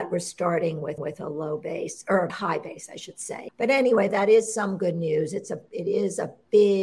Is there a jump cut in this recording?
yes; 2 cuts; at 1.0 s, 2.3 s

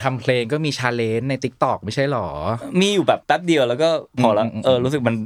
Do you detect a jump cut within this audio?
yes; 1 cut; at 3.2 s

